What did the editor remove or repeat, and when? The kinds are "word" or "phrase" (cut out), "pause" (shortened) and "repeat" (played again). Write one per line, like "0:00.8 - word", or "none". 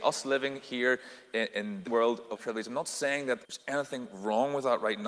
0:01.5 - word
0:01.9 - word
0:02.4 - word
0:03.4 - pause